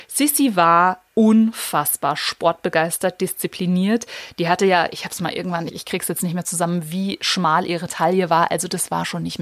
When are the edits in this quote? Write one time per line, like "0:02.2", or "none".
0:01.1
0:05.7